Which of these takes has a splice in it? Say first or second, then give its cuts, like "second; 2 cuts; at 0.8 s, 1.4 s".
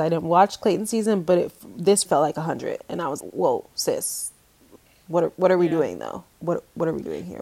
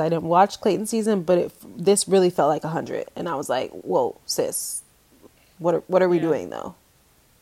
first; 3 cuts; at 2.0 s, 3.2 s, 6.3 s